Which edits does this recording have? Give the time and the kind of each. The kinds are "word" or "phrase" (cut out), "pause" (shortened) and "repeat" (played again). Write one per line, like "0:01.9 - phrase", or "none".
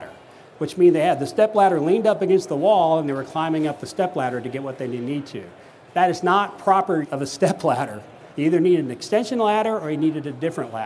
0:07.0 - word
0:08.3 - pause

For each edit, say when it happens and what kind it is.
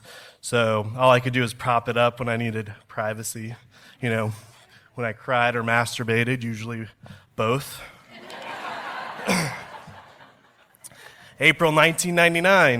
none

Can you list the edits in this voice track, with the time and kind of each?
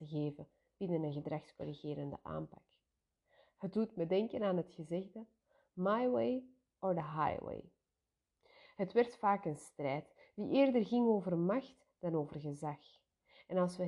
none

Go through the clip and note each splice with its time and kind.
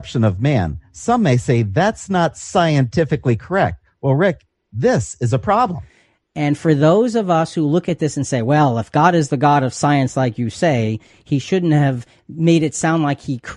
none

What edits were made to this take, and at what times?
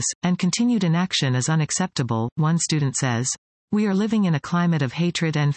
0:03.4 - pause

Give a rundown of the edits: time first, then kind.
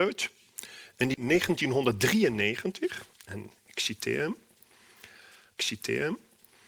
0:01.1 - word
0:03.1 - pause
0:05.6 - repeat

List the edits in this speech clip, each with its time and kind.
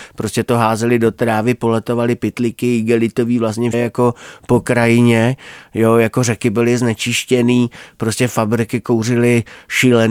0:03.7 - word

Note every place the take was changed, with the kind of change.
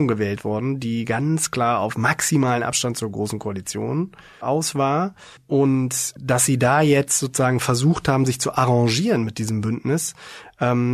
none

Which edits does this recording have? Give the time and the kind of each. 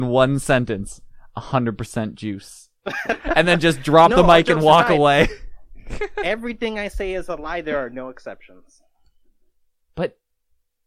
none

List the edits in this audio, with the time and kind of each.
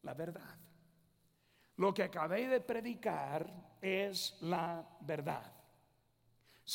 none

